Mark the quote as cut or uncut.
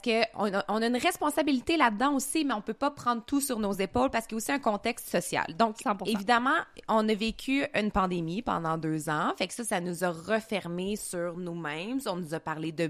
uncut